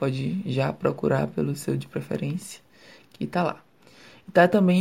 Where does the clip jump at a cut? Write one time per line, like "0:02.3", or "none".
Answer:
none